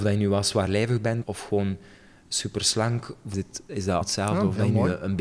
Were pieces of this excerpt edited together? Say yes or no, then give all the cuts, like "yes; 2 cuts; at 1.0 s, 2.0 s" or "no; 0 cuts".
yes; 3 cuts; at 1.2 s, 3.3 s, 4.0 s